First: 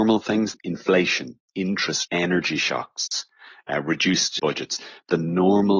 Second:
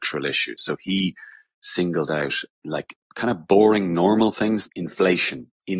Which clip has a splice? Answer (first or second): first